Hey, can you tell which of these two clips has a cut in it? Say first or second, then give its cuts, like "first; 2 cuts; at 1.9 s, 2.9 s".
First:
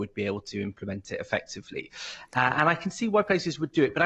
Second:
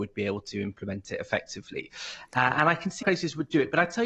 second; 1 cut; at 3.0 s